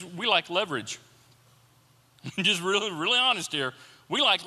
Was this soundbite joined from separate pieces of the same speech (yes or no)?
no